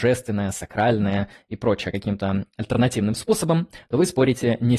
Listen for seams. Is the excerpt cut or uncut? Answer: uncut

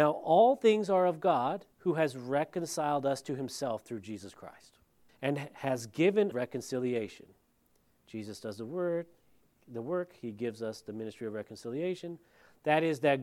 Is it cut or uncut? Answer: cut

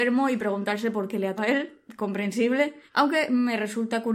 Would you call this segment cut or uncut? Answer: cut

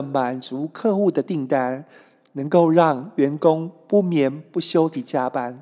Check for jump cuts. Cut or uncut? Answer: uncut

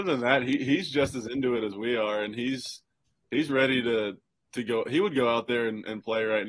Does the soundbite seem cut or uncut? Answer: uncut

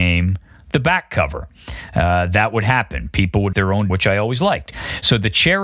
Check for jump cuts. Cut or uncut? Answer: cut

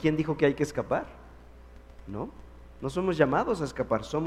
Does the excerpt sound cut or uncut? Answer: uncut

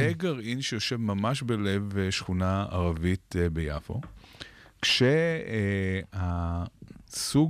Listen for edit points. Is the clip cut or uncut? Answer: uncut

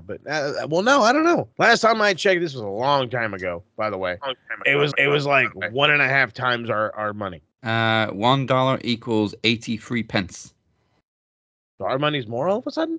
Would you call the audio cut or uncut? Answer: cut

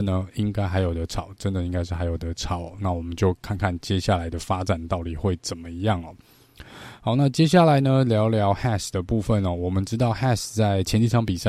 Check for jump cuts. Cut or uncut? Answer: uncut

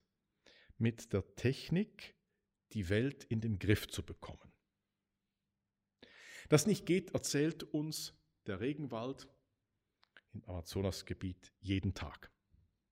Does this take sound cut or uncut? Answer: cut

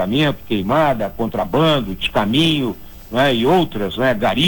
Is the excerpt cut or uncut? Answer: uncut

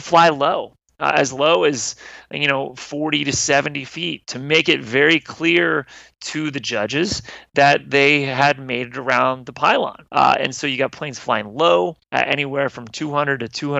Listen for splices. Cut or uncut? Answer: cut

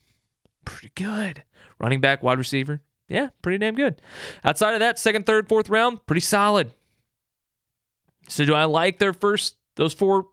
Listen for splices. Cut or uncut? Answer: uncut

